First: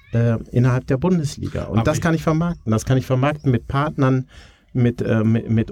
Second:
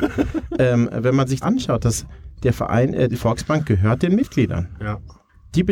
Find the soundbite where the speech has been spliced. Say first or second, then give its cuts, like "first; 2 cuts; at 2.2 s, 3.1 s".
second; 2 cuts; at 1.4 s, 3.1 s